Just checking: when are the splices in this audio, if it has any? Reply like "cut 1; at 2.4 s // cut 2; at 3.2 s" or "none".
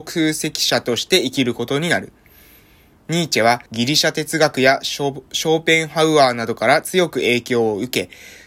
cut 1; at 3.7 s